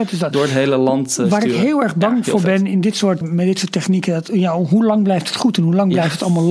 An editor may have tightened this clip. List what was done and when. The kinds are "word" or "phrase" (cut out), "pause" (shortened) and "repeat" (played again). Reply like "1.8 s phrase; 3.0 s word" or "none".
3.2 s word